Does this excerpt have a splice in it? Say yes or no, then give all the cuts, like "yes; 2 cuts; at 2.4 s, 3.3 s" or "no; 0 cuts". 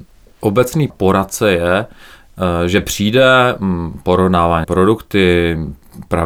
yes; 2 cuts; at 0.9 s, 4.6 s